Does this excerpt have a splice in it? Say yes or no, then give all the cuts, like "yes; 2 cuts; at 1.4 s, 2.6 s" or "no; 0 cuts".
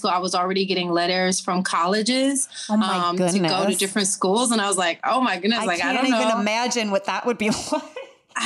no; 0 cuts